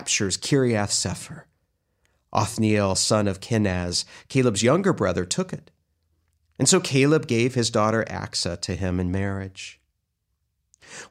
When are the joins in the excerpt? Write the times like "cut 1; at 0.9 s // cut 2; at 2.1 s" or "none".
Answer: none